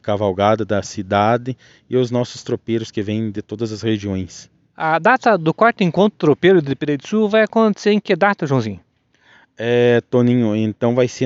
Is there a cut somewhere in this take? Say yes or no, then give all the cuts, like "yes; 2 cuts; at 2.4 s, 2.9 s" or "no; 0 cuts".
no; 0 cuts